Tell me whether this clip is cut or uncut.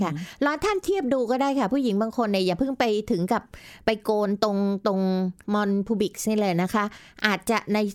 cut